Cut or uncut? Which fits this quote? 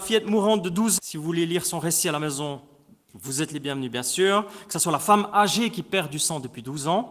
cut